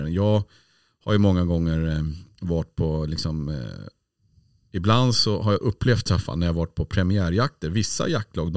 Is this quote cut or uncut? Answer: uncut